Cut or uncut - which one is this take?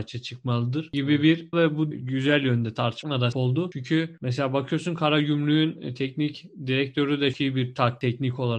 cut